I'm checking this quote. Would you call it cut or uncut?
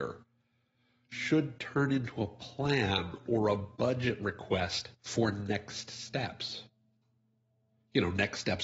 uncut